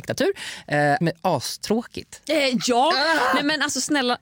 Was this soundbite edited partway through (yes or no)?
yes